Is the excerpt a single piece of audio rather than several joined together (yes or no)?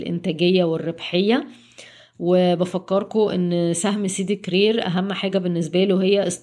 yes